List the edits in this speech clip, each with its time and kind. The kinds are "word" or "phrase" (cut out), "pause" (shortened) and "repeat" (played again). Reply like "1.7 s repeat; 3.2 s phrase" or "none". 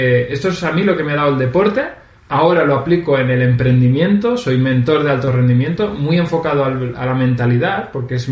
2.2 s pause